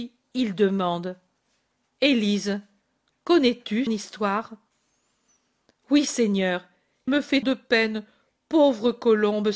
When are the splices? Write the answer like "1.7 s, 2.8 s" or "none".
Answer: 3.9 s, 7.1 s, 7.4 s

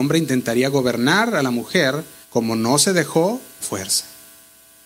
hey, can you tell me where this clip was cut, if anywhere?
2.2 s, 3.6 s

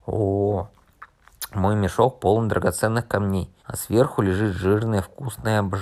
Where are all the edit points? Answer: 3.6 s

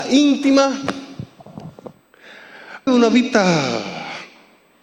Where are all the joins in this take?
2.9 s

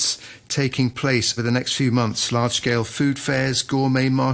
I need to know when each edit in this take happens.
1.4 s

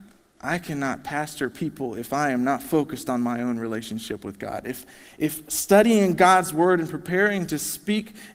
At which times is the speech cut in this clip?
none

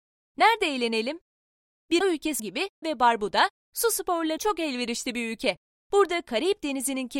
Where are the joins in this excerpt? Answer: 2.0 s, 2.4 s, 2.8 s, 4.4 s

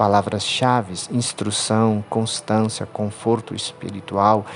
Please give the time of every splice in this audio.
none

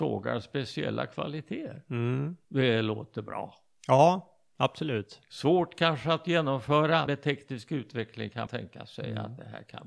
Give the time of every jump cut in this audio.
2.4 s, 7.1 s, 8.5 s

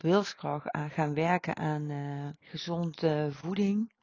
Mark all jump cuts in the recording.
2.4 s

